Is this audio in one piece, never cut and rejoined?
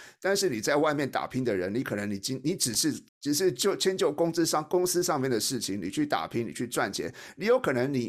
no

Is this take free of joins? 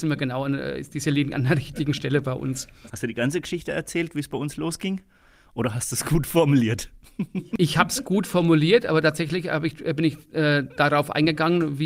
yes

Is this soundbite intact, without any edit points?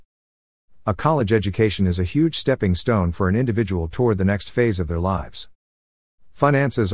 yes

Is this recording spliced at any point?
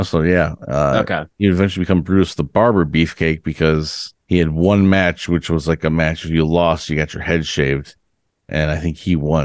yes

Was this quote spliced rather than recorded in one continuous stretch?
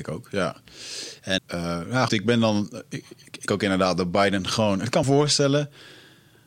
yes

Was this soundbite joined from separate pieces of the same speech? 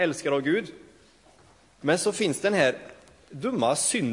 no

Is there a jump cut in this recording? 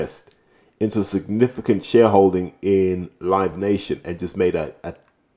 no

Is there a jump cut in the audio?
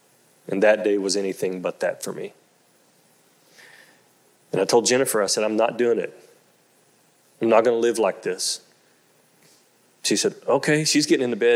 no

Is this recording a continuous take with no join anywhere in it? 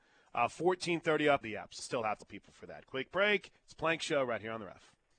no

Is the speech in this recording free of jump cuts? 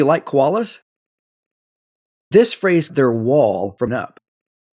no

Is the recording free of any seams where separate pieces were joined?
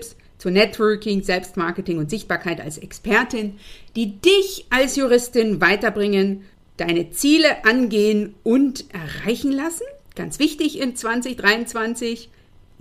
yes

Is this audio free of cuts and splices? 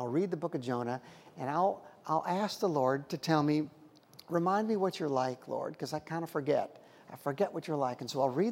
yes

